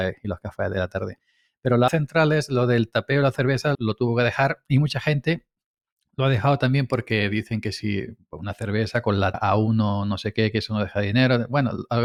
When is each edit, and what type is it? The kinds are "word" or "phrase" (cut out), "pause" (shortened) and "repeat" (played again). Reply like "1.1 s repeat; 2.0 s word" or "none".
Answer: 1.9 s word; 3.7 s word; 9.3 s word